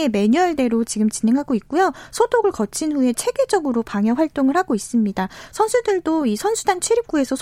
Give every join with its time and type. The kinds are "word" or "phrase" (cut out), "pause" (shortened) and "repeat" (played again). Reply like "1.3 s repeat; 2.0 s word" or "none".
none